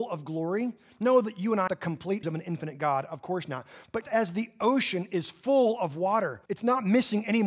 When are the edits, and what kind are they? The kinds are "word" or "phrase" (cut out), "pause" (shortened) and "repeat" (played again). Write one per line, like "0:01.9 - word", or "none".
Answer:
0:01.7 - phrase
0:02.2 - word
0:04.0 - word
0:06.5 - pause